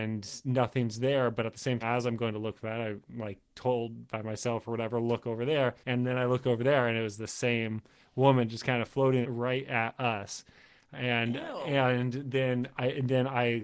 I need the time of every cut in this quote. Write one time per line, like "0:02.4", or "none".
0:01.8
0:05.8
0:09.2